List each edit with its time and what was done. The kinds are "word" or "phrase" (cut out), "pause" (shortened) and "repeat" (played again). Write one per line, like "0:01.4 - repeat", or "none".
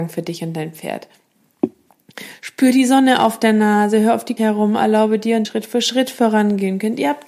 0:04.4 - phrase
0:05.4 - phrase